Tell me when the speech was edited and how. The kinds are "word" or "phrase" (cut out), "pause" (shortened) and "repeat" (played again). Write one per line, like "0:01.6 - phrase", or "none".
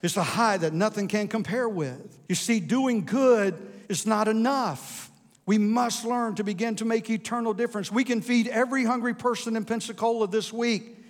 0:02.2 - pause
0:03.8 - pause